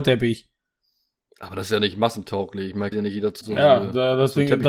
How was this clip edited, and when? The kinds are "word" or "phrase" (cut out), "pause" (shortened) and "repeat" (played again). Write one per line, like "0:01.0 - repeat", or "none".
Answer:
0:02.9 - word
0:03.4 - word